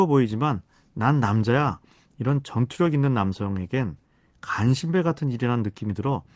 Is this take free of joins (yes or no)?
yes